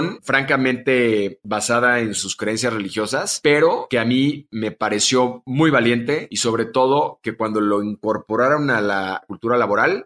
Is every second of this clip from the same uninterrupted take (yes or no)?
yes